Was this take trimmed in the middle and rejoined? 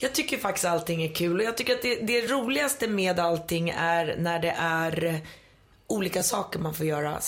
no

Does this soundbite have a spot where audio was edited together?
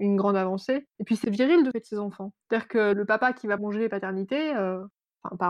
yes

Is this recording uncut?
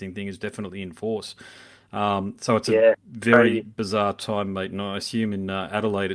yes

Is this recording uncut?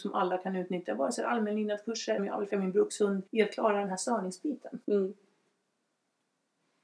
no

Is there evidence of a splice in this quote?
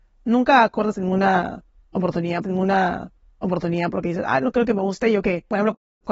yes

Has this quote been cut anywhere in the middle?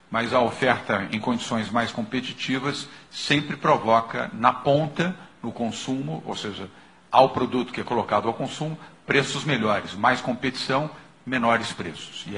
no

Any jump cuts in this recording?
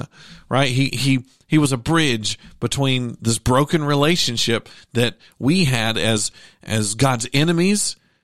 no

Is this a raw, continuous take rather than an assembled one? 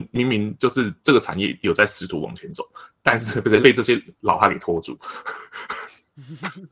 no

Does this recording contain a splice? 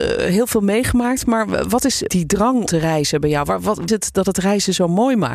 yes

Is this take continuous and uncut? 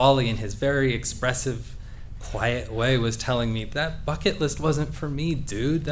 yes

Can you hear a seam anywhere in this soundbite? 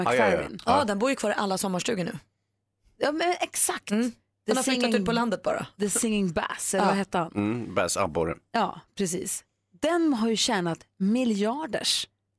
no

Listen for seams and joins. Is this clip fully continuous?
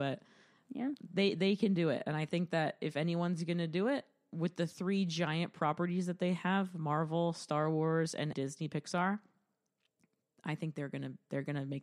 no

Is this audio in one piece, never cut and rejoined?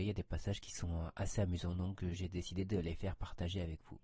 yes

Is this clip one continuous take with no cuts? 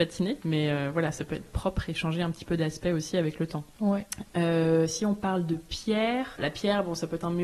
no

